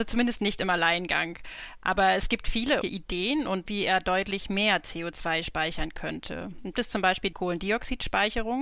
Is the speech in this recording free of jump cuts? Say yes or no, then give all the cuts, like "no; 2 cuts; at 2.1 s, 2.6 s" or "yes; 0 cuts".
no; 4 cuts; at 2.8 s, 3.7 s, 6.7 s, 7.3 s